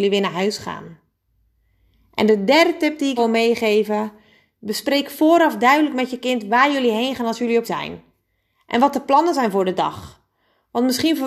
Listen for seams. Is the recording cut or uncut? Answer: cut